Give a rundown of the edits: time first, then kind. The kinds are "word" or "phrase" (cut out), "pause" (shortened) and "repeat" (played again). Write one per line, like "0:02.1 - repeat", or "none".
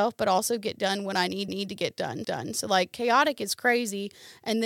0:01.5 - repeat
0:02.2 - repeat

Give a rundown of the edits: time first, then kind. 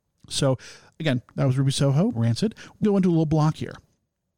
0:02.1 - word
0:02.8 - word

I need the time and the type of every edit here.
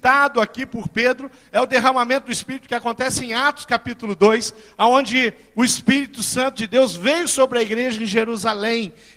none

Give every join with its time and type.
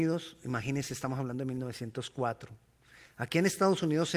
none

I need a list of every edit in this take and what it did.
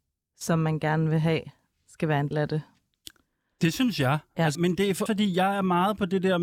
0:02.3 - word
0:04.5 - word
0:05.1 - word

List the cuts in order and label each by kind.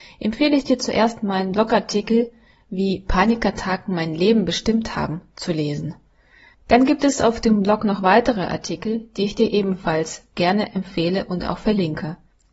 none

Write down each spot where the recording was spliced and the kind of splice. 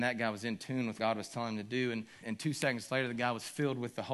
0:01.0 - word
0:02.2 - word

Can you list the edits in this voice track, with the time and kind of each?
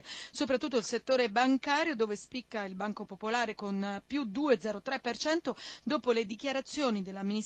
none

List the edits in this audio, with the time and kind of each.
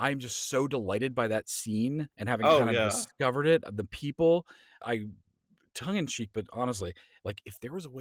0:02.1 - pause
0:04.8 - word

